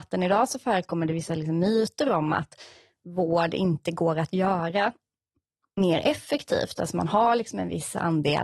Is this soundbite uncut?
yes; 0 cuts

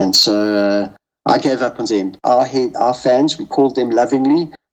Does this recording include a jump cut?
yes; 1 cut; at 1.9 s

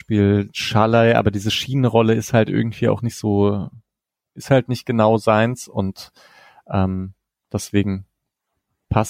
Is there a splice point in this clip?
no; 0 cuts

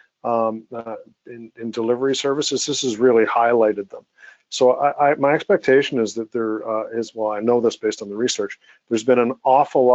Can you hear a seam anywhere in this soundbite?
no; 0 cuts

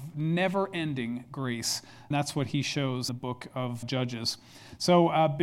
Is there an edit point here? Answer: yes; 3 cuts; at 2.1 s, 3.1 s, 3.8 s

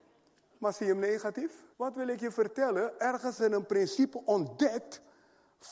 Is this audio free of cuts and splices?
no; 2 cuts; at 1.7 s, 3.4 s

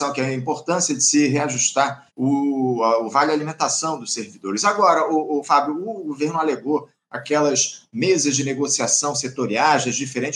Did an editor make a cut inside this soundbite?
yes; 1 cut; at 2.1 s

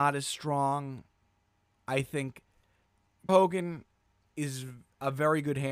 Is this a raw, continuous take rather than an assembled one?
no; 1 cut; at 3.3 s

